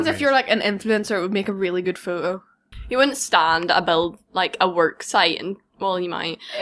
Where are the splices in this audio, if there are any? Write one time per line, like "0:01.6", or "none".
none